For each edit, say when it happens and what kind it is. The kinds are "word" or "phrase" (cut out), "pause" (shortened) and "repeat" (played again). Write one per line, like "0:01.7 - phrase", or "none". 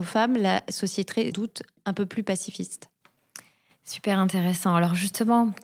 0:01.3 - phrase

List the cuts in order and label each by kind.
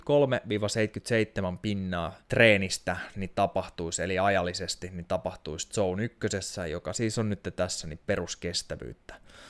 0:02.2 - pause

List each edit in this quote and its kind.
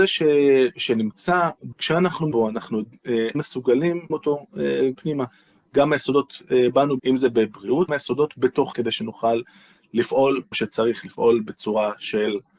0:01.7 - word
0:02.3 - word
0:03.3 - word
0:04.1 - word
0:04.9 - word
0:07.0 - word
0:07.9 - word
0:08.7 - word
0:10.5 - word

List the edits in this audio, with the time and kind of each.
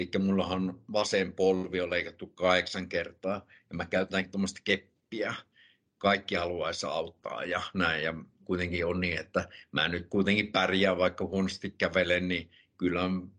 none

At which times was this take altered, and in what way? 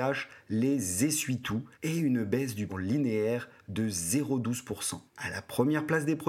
0:01.7 - pause
0:02.7 - phrase
0:05.1 - pause

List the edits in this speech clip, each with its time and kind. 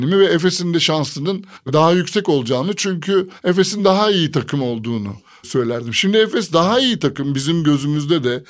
none

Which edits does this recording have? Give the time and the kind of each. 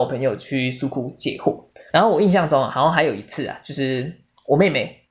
0:01.9 - word

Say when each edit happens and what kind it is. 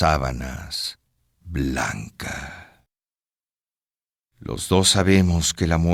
none

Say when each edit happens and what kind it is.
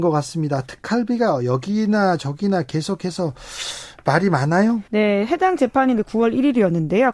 0:04.9 - pause
0:06.0 - word

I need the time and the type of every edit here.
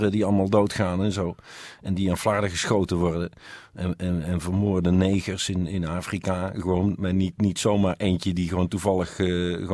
none

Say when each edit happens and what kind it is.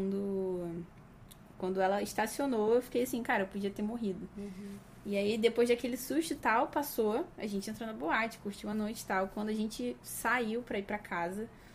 none

